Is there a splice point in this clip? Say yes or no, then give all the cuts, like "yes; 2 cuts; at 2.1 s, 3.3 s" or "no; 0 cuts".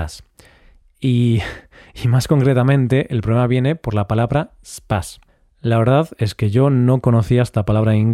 no; 0 cuts